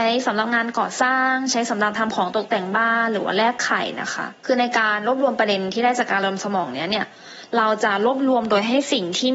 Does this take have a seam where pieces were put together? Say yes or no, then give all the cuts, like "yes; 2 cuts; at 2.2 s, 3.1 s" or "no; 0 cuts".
yes; 1 cut; at 4.4 s